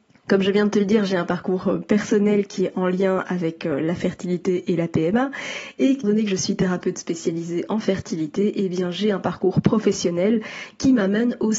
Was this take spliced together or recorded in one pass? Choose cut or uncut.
cut